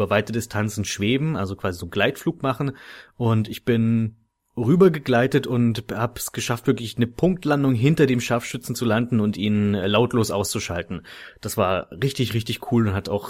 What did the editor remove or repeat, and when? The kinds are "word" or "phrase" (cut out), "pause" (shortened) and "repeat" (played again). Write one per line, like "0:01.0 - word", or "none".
none